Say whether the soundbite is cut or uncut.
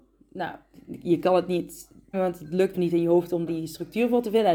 cut